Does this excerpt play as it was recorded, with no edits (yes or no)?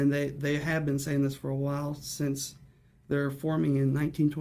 yes